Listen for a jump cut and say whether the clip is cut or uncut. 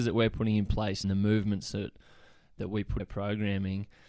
cut